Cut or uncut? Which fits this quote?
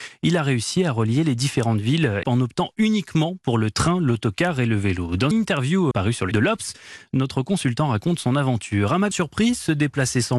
cut